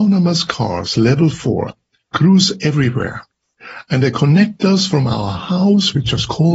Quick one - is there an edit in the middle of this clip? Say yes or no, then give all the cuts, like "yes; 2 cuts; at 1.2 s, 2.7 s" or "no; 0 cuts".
no; 0 cuts